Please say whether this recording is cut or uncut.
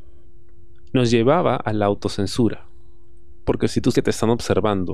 cut